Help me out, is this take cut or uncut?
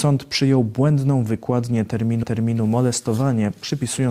cut